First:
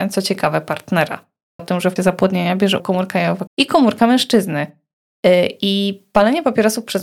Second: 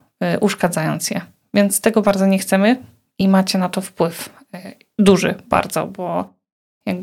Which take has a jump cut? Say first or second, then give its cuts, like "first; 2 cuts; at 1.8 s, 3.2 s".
first; 4 cuts; at 1.6 s, 2.0 s, 2.8 s, 3.5 s